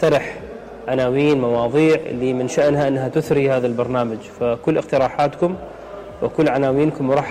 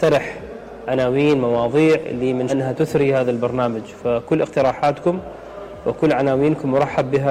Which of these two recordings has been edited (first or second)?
second